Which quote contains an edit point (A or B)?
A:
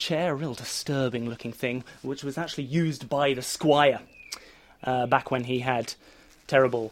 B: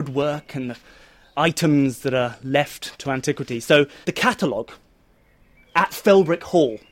B